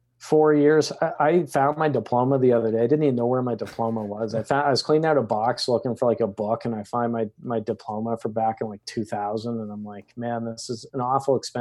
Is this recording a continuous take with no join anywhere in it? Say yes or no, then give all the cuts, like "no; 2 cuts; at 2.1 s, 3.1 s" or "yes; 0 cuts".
yes; 0 cuts